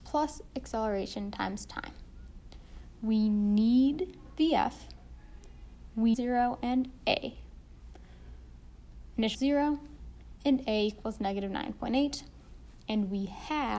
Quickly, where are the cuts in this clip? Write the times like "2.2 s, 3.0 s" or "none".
6.1 s, 9.3 s